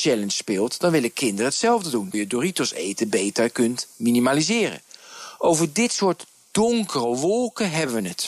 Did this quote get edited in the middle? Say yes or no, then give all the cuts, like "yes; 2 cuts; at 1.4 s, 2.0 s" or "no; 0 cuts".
yes; 1 cut; at 2.1 s